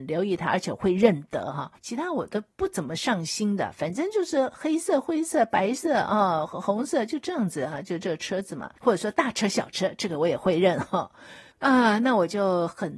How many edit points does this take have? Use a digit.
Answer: 4